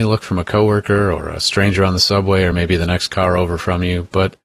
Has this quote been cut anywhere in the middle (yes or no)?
no